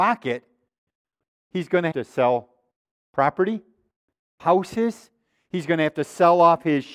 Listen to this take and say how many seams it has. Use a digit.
2